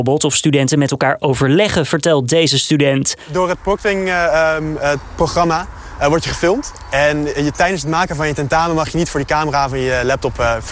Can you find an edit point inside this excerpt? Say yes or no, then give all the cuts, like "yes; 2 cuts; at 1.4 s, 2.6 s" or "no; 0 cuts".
no; 0 cuts